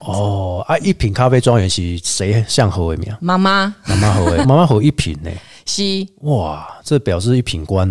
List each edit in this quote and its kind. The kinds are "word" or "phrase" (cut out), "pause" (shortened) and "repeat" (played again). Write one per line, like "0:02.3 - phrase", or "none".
none